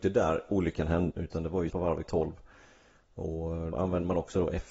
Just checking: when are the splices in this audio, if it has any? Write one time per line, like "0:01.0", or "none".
0:01.1
0:01.7
0:02.0
0:03.7